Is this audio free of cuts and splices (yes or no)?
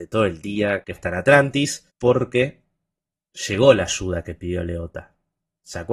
no